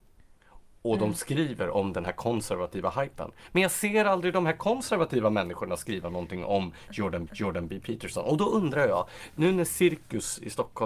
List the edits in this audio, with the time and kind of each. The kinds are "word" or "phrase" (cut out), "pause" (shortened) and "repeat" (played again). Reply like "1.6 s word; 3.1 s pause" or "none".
7.3 s repeat